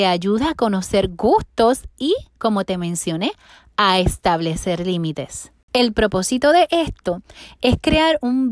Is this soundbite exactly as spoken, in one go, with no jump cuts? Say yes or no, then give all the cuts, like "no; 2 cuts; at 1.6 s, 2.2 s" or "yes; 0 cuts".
yes; 0 cuts